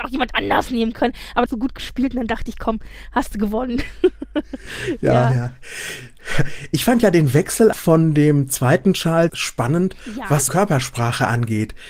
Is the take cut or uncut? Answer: cut